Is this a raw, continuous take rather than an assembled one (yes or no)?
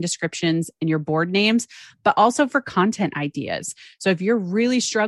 yes